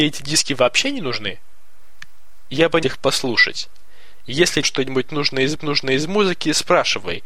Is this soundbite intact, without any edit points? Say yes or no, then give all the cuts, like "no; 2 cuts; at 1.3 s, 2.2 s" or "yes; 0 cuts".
no; 3 cuts; at 2.8 s, 4.6 s, 5.6 s